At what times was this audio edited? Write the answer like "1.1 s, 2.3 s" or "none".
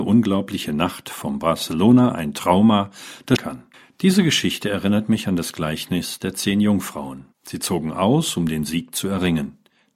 3.4 s, 3.7 s, 7.3 s

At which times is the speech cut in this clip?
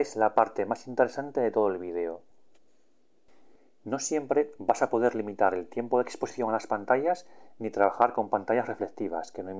none

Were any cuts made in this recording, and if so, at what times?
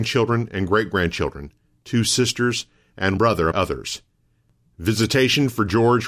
3.2 s, 3.5 s

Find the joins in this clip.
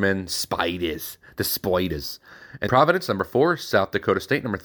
2.7 s

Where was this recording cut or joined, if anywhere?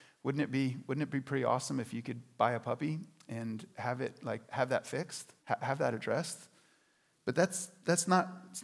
4.4 s, 5.4 s

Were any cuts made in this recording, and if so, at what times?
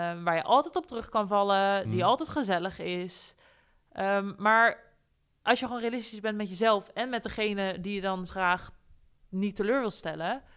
8.3 s

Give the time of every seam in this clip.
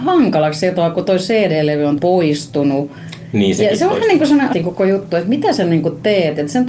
2.0 s, 4.5 s

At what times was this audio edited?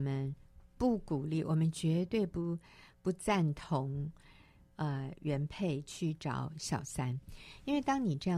none

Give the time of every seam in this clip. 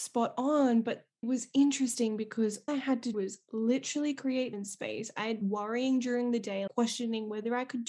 1.2 s, 2.7 s, 3.1 s, 4.5 s, 5.4 s, 6.7 s

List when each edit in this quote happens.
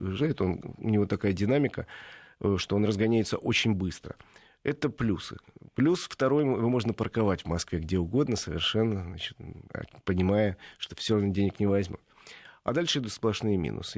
none

